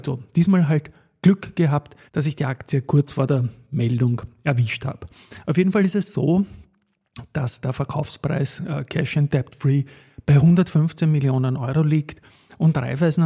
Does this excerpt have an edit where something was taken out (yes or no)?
yes